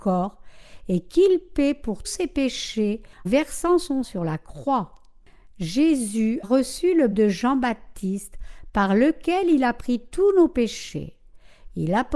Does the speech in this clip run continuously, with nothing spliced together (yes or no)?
no